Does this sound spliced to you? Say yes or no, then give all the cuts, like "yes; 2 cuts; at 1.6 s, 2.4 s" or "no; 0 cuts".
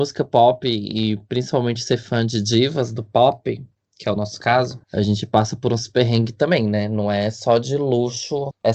no; 0 cuts